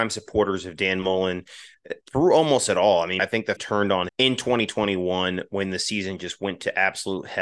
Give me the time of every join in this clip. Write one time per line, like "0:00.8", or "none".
0:02.0
0:03.2
0:03.6
0:04.1